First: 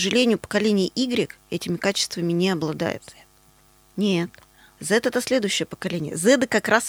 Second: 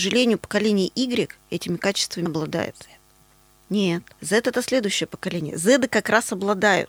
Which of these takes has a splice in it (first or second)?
second